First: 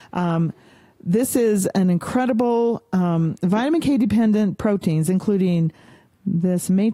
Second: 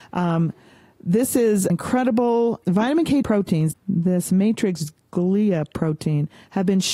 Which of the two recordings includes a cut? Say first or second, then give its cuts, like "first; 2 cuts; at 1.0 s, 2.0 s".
second; 4 cuts; at 1.7 s, 2.6 s, 3.2 s, 3.7 s